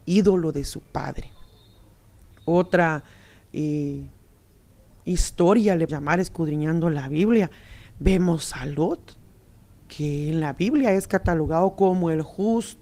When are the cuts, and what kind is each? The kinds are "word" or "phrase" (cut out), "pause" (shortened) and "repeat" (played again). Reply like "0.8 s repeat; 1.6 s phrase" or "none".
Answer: 5.9 s word